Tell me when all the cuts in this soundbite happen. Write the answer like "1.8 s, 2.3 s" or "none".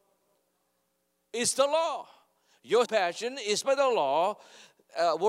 2.8 s, 3.6 s